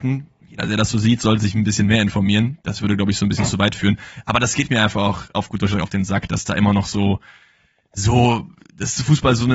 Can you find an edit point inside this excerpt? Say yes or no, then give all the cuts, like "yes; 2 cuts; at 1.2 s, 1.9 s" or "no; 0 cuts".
no; 0 cuts